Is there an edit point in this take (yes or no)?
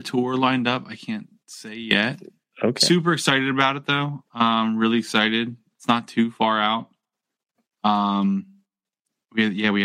no